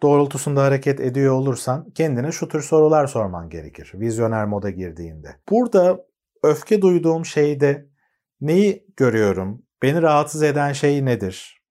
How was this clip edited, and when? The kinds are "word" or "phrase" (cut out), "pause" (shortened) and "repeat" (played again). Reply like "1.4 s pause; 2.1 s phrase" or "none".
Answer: 5.4 s pause